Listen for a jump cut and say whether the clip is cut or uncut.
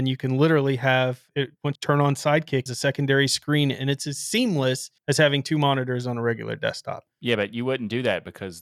cut